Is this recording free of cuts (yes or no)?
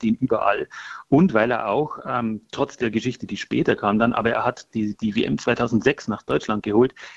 yes